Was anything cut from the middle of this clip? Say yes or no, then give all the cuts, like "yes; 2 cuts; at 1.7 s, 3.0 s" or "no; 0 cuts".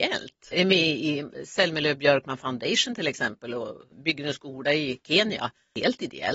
no; 0 cuts